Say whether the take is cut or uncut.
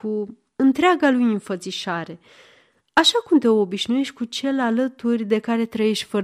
uncut